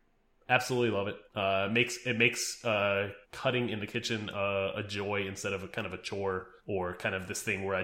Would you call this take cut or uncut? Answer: cut